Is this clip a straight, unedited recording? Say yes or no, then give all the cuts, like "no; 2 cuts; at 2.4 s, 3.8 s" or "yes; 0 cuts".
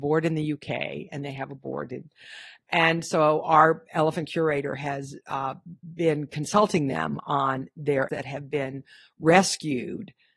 no; 1 cut; at 8.1 s